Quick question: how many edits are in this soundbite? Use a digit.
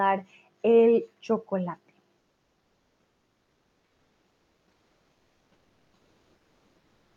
0